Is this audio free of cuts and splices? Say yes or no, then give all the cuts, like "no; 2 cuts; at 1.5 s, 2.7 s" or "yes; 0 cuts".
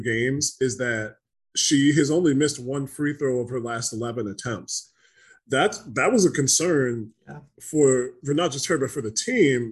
yes; 0 cuts